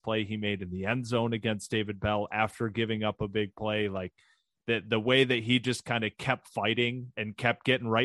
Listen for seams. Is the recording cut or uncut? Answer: uncut